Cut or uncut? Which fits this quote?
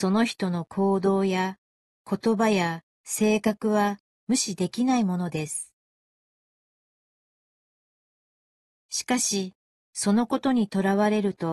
cut